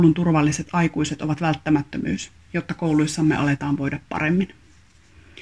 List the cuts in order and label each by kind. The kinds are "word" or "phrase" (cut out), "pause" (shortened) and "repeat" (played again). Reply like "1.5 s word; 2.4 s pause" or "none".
none